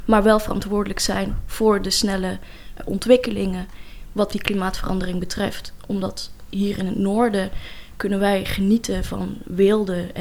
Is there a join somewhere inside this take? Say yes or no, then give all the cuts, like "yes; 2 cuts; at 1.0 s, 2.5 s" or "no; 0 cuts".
yes; 1 cut; at 2.8 s